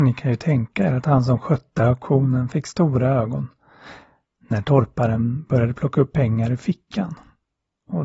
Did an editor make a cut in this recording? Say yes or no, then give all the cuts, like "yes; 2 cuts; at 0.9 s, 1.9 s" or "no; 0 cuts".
no; 0 cuts